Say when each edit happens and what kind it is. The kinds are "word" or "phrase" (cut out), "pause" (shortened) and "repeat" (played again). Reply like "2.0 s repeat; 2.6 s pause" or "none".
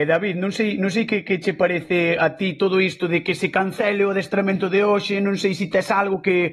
none

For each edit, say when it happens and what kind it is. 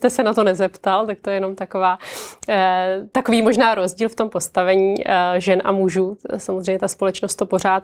none

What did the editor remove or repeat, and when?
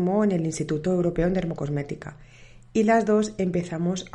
none

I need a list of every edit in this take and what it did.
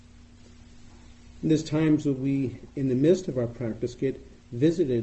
none

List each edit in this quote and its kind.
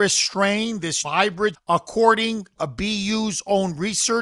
1.0 s word; 1.5 s word; 2.6 s word

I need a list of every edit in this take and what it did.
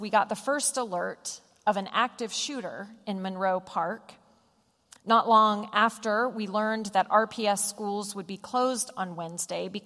none

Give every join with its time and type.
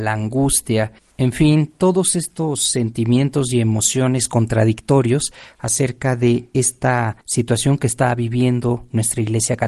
7.2 s pause

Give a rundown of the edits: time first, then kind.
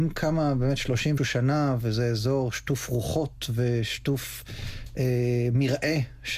1.2 s word

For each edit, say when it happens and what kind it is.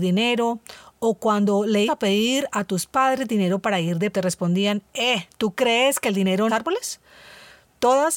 1.9 s word; 4.1 s phrase; 6.5 s phrase

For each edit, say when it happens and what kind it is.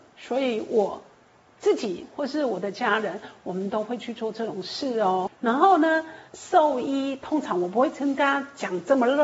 6.3 s pause

